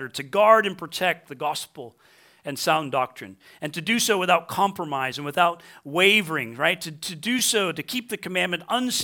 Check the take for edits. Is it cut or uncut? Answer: uncut